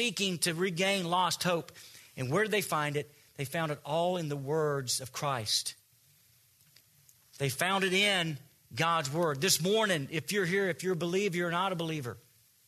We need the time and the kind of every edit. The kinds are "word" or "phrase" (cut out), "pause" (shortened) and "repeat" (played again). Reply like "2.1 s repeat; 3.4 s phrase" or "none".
none